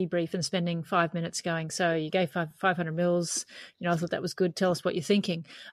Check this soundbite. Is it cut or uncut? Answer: uncut